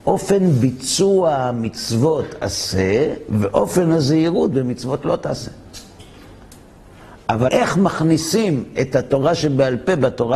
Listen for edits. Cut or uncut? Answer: cut